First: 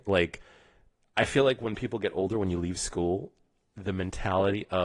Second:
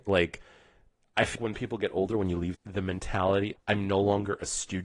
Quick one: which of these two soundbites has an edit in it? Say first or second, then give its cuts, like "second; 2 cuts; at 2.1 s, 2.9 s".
second; 3 cuts; at 1.4 s, 2.5 s, 3.6 s